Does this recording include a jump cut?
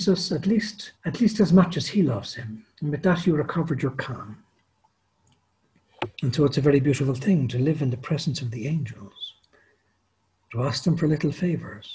yes; 3 cuts; at 0.9 s, 2.7 s, 6.1 s

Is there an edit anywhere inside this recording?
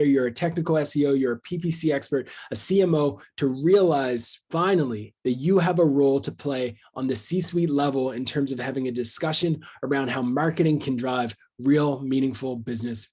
yes; 1 cut; at 5.2 s

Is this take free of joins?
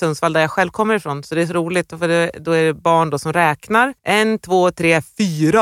no; 1 cut; at 4.0 s

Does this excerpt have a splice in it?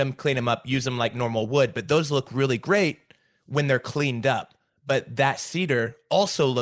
no; 0 cuts

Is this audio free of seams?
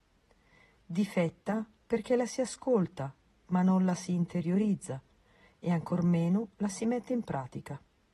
yes; 0 cuts

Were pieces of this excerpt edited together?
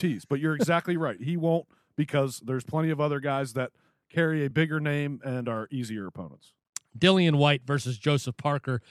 no; 0 cuts

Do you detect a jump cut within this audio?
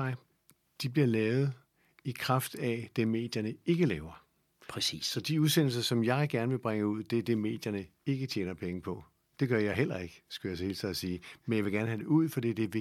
no; 0 cuts

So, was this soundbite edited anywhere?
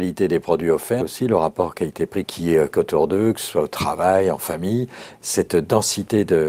yes; 4 cuts; at 1.0 s, 2.2 s, 2.7 s, 5.2 s

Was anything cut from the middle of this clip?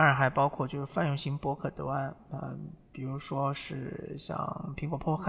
no; 0 cuts

